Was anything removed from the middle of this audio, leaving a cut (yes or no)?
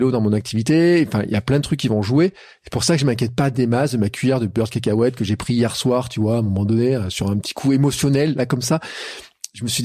no